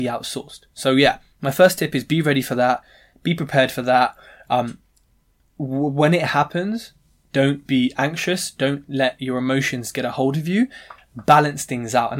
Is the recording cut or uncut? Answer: uncut